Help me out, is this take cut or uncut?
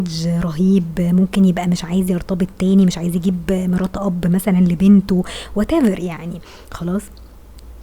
uncut